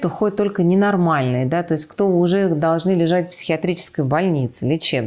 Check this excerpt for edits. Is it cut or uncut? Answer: uncut